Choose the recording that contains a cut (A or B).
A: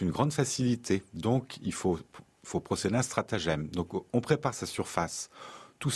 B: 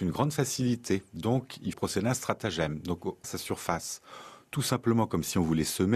B